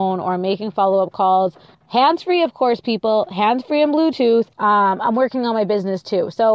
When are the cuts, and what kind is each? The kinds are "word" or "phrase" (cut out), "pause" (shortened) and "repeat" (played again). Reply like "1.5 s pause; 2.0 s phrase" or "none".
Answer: 1.7 s pause; 4.5 s pause